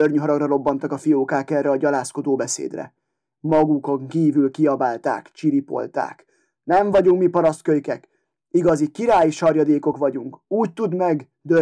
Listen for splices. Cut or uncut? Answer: uncut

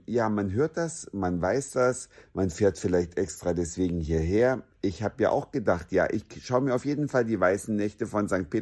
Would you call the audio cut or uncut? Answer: uncut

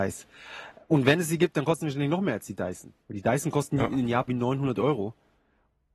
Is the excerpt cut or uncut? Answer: cut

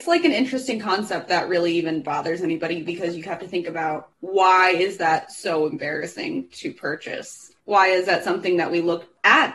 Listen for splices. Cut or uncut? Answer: cut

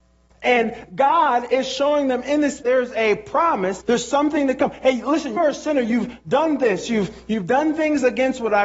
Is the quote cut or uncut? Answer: cut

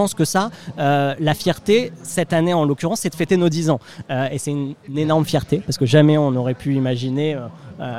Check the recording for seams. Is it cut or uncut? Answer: uncut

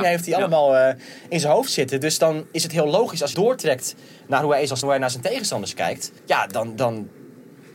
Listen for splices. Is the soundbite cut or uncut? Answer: cut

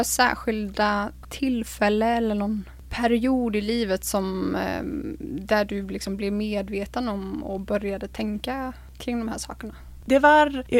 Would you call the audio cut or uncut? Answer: uncut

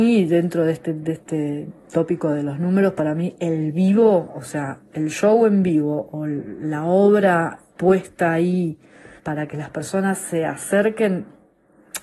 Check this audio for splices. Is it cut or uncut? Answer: cut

